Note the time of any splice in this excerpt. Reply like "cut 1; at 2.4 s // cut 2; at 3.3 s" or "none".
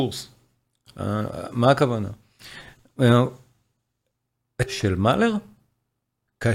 cut 1; at 4.7 s